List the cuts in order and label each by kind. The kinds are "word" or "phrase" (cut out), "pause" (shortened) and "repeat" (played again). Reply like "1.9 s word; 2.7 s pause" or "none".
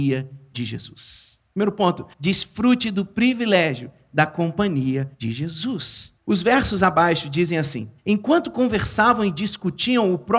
1.5 s pause; 2.1 s pause; 5.1 s pause; 6.2 s pause; 8.0 s pause